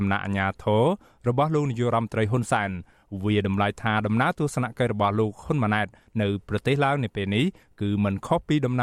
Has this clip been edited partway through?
no; 0 cuts

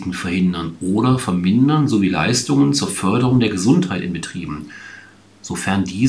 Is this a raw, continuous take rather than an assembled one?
yes; 0 cuts

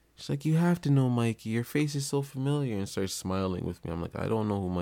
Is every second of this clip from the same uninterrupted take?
yes; 0 cuts

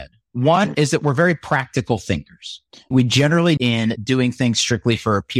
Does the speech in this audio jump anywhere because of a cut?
yes; 2 cuts; at 2.7 s, 3.6 s

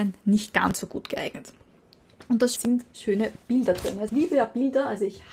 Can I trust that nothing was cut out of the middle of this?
no; 2 cuts; at 2.6 s, 4.1 s

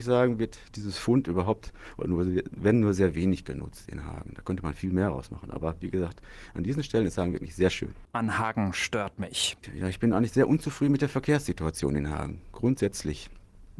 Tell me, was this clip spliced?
no; 0 cuts

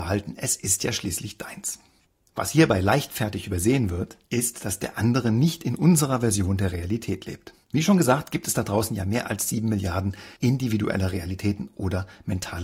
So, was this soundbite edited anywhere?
yes; 3 cuts; at 2.1 s, 7.6 s, 10.4 s

